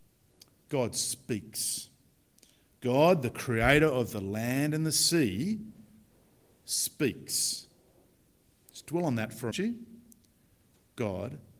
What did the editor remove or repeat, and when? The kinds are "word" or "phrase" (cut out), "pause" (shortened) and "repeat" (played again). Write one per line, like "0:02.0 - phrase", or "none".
0:09.5 - phrase